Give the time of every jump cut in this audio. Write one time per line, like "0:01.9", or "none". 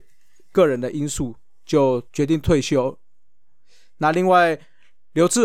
0:02.1